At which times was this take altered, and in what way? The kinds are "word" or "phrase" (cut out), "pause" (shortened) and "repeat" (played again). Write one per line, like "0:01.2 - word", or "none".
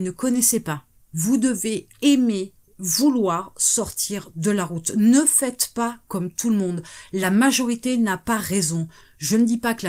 none